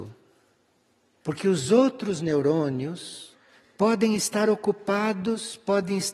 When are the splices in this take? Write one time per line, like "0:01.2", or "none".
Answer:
none